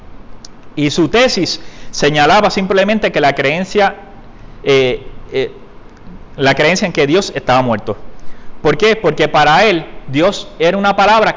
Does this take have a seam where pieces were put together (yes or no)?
yes